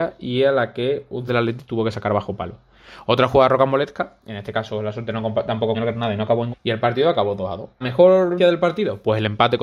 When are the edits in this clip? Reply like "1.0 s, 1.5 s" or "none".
1.3 s, 5.7 s, 6.5 s, 7.8 s, 8.4 s